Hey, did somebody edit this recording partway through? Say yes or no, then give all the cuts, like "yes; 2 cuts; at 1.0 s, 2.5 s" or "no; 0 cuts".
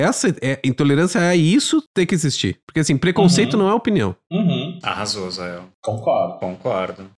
no; 0 cuts